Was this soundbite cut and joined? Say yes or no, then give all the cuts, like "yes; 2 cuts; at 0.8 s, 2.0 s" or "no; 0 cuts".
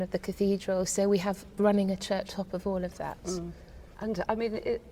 yes; 1 cut; at 2.3 s